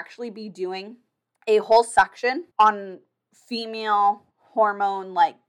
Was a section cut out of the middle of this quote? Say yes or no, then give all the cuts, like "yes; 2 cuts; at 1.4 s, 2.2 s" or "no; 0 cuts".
yes; 3 cuts; at 1.2 s, 2.5 s, 4.3 s